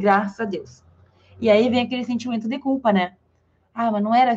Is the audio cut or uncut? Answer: uncut